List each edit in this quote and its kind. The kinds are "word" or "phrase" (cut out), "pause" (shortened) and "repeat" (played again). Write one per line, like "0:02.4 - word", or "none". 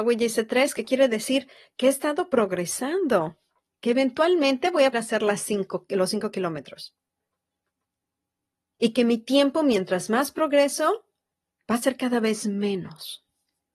0:04.9 - word